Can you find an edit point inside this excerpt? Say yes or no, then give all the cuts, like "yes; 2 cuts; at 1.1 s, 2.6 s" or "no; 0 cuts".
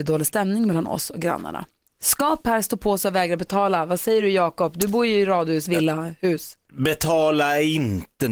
no; 0 cuts